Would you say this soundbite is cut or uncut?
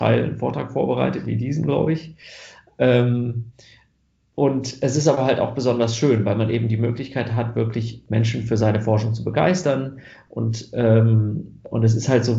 uncut